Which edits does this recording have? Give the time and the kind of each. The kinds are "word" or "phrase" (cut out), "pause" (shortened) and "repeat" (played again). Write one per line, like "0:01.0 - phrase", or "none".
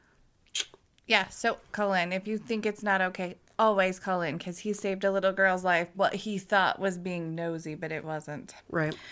0:01.7 - word
0:05.9 - word
0:08.0 - word